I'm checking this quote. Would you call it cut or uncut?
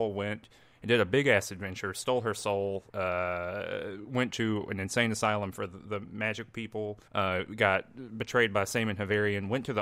cut